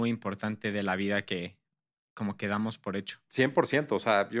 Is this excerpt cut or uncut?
uncut